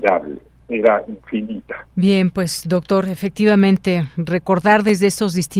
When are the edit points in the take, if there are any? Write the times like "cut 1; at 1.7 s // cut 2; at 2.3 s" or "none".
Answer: cut 1; at 1.9 s